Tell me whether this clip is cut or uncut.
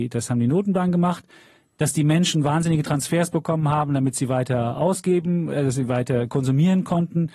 uncut